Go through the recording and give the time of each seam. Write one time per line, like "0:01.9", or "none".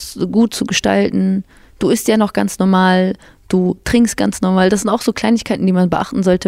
none